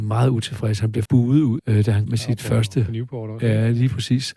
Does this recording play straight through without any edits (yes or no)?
no